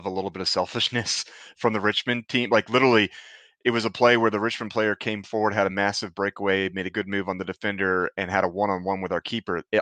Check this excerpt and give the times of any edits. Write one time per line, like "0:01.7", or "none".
none